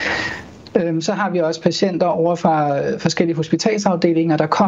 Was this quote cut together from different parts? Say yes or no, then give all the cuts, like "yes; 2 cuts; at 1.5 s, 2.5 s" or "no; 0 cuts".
no; 0 cuts